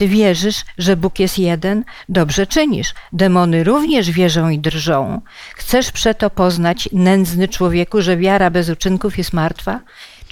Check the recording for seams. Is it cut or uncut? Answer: uncut